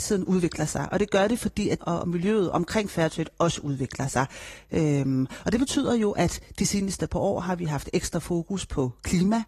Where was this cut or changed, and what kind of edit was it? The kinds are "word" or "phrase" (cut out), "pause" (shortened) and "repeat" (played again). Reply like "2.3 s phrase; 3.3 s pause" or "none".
1.8 s word

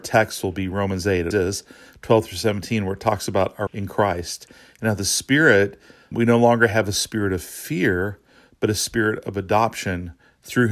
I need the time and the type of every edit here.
1.3 s word; 3.7 s word; 6.1 s word

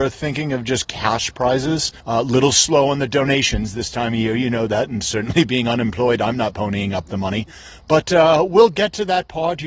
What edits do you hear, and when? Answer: 2.0 s pause

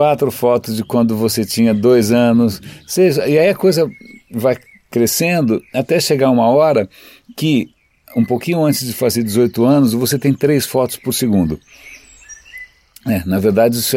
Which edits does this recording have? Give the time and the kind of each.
none

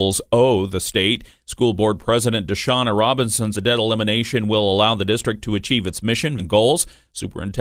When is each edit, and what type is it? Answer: 3.5 s word; 6.4 s word

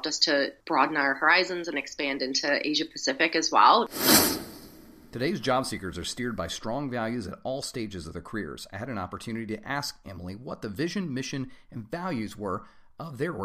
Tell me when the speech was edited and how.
none

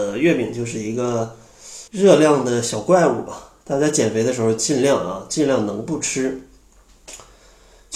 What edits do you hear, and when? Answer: 1.9 s pause

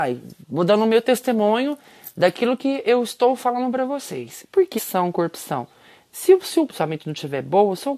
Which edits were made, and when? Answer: 4.8 s word; 6.7 s word

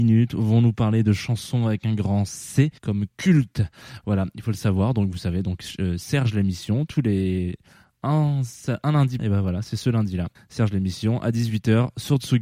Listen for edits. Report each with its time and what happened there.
2.8 s pause; 9.2 s phrase; 10.4 s pause

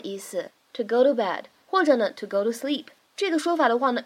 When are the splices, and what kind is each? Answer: none

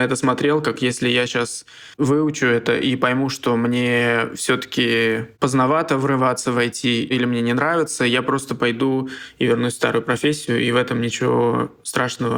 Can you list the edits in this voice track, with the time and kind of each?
1.9 s pause

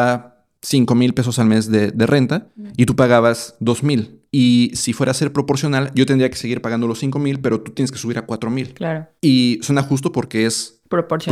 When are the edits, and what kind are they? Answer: 4.3 s pause; 9.2 s pause

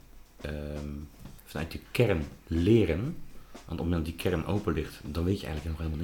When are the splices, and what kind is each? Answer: 1.4 s pause

